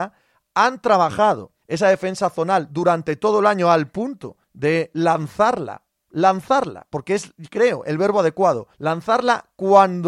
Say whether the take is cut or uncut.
cut